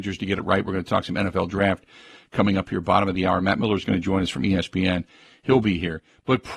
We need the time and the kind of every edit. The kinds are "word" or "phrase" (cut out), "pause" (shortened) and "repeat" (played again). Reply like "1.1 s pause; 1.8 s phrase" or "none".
none